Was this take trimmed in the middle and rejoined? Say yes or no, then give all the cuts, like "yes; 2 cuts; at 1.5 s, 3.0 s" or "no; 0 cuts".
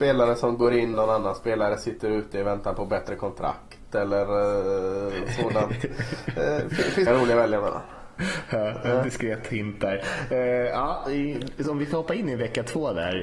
yes; 2 cuts; at 0.9 s, 7.1 s